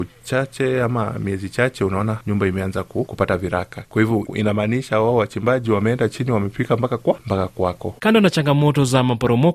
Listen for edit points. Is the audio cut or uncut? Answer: cut